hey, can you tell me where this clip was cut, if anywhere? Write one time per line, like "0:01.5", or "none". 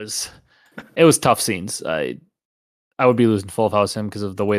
none

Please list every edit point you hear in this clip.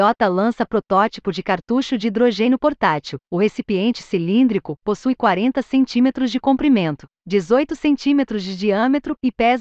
0:03.2

